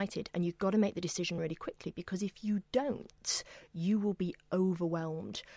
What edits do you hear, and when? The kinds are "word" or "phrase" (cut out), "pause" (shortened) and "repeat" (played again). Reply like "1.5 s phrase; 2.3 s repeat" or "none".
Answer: none